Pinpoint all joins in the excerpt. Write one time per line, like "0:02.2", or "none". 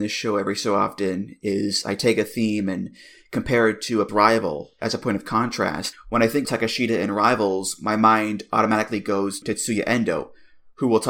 0:04.1
0:05.9
0:06.4
0:09.4